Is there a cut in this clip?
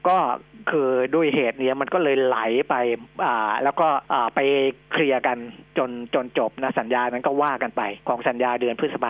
yes; 2 cuts; at 4.0 s, 8.0 s

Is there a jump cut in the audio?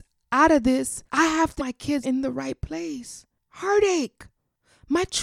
yes; 3 cuts; at 1.1 s, 1.6 s, 2.0 s

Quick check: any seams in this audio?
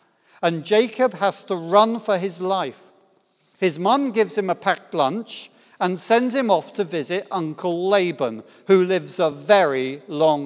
no; 0 cuts

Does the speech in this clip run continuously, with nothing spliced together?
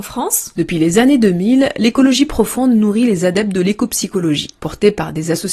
yes; 0 cuts

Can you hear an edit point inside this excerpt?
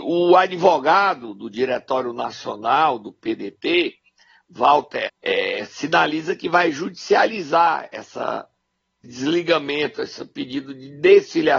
yes; 2 cuts; at 5.1 s, 9.0 s

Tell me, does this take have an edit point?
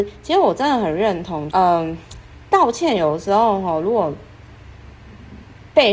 yes; 1 cut; at 1.5 s

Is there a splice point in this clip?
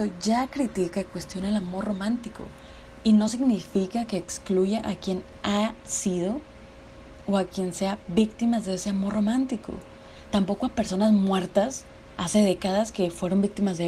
no; 0 cuts

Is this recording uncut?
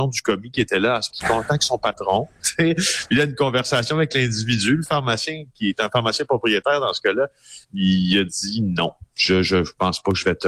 no; 2 cuts; at 1.1 s, 7.6 s

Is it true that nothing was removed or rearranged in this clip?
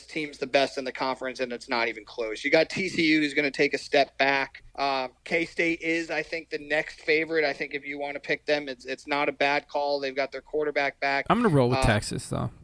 no; 1 cut; at 4.7 s

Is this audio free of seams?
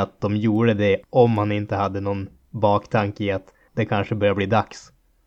no; 2 cuts; at 1.0 s, 3.7 s

